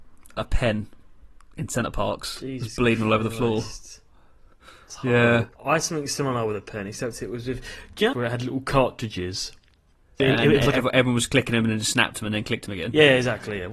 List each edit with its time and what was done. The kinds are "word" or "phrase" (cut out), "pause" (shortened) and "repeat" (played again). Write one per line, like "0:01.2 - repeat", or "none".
0:05.5 - pause
0:08.1 - phrase
0:10.2 - word